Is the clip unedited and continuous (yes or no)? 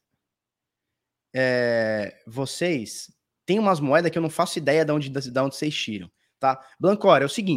yes